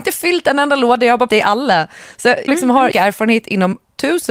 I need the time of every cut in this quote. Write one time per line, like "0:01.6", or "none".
0:01.3
0:02.5
0:02.9